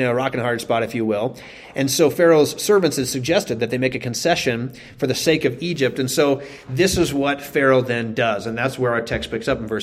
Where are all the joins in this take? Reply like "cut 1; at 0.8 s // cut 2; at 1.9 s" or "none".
none